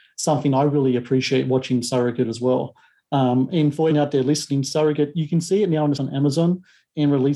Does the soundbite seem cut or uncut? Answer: cut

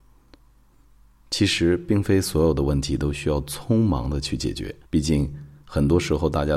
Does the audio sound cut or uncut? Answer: cut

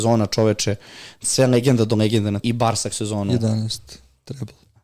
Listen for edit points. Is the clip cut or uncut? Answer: cut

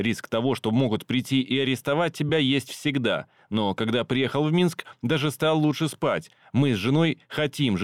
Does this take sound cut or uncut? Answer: uncut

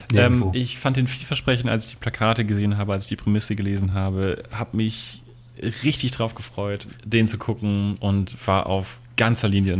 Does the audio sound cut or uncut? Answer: uncut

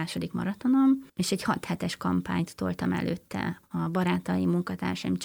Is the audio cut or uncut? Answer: uncut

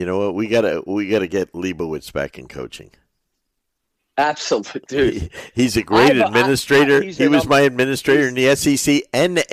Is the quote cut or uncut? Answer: uncut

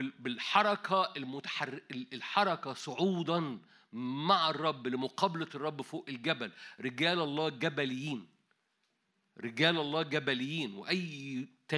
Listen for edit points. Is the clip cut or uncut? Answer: uncut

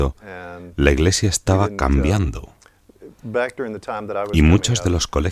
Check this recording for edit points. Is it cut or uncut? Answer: uncut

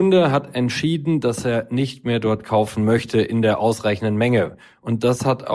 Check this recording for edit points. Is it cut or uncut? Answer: uncut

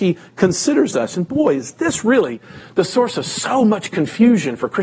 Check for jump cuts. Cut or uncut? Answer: uncut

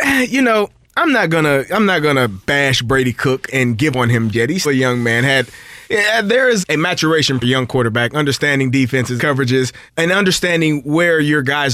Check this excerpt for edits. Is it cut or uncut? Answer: cut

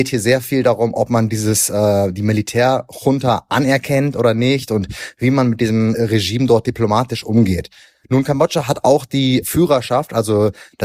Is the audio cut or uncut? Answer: uncut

